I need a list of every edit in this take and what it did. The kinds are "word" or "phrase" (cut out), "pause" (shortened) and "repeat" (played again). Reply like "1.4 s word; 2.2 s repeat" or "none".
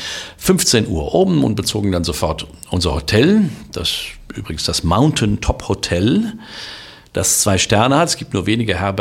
none